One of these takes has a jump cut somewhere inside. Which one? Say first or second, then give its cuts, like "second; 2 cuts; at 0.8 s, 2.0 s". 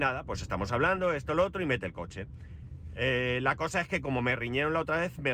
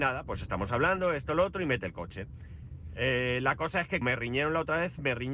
second; 1 cut; at 4.0 s